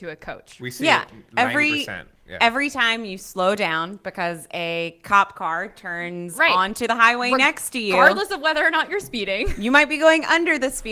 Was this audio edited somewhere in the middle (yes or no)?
no